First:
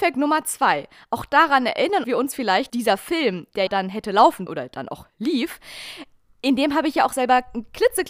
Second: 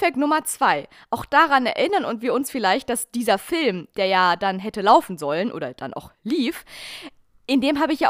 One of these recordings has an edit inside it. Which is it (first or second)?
first